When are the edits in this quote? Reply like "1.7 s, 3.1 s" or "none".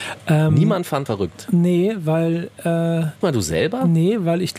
1.1 s, 3.2 s